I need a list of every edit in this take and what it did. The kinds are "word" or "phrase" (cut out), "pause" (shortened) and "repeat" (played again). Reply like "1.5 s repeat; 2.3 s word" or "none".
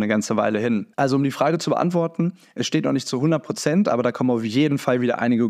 0.9 s pause